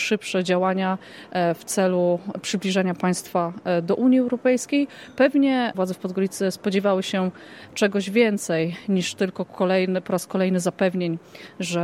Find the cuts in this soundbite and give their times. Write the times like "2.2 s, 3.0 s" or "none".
5.7 s